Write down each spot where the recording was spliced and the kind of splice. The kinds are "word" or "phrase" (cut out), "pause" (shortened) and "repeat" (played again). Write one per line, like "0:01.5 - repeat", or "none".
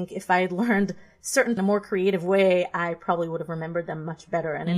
0:01.6 - phrase